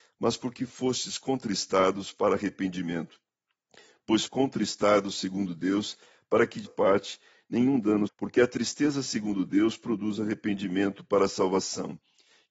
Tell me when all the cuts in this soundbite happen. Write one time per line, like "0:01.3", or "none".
0:04.3
0:06.7
0:08.1